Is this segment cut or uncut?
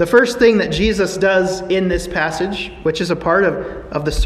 uncut